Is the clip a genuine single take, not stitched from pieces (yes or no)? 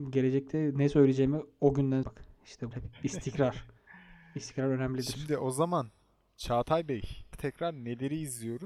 no